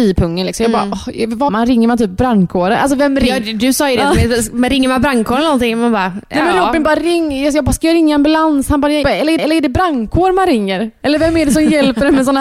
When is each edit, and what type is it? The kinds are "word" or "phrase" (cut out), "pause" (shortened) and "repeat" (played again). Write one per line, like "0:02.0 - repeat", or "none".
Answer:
0:01.5 - word
0:09.0 - word
0:09.4 - repeat

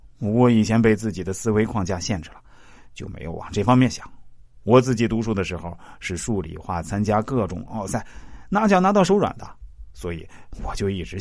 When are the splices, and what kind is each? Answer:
none

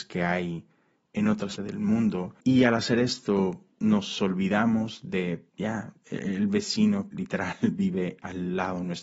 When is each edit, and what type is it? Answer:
0:01.6 - word
0:02.4 - pause
0:03.7 - pause
0:05.5 - pause
0:07.1 - word

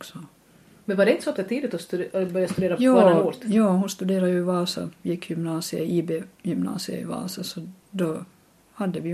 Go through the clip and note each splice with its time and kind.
0:01.4 - phrase

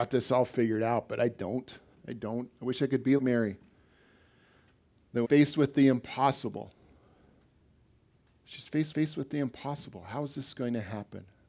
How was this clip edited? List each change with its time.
0:01.9 - pause
0:03.2 - word
0:05.2 - phrase
0:08.9 - repeat

